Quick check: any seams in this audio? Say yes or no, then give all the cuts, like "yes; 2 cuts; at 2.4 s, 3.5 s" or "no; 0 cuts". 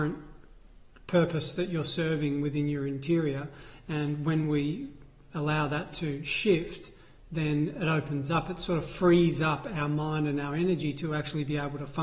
no; 0 cuts